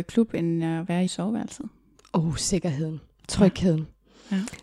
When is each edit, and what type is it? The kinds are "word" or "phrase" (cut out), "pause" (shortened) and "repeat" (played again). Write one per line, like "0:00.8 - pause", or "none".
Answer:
0:01.1 - word